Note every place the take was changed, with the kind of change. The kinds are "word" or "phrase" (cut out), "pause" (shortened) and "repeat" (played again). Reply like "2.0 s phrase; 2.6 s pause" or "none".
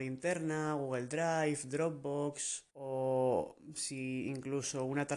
2.7 s pause